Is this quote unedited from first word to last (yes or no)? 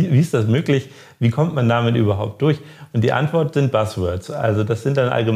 yes